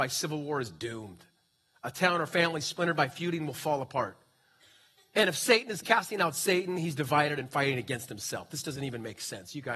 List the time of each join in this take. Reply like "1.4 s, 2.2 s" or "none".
none